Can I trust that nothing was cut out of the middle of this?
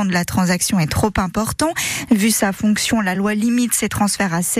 yes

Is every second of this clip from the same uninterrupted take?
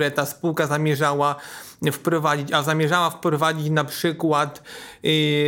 yes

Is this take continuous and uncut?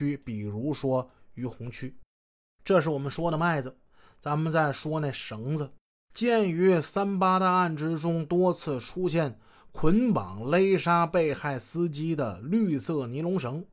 yes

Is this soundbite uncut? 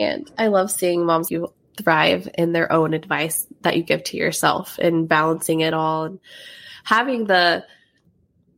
no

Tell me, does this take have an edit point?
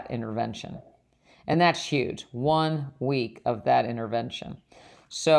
no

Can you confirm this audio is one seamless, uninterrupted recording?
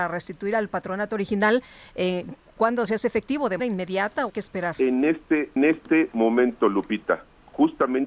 no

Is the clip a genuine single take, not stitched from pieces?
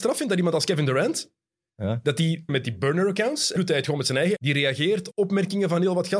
no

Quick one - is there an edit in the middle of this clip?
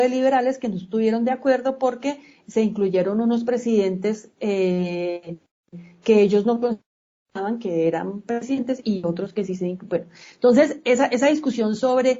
no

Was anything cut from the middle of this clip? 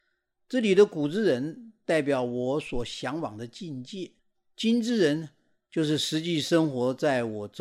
yes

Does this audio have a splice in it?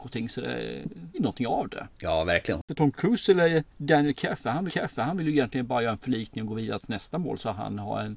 yes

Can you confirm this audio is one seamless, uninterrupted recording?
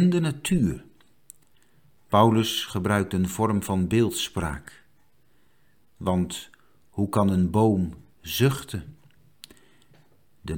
yes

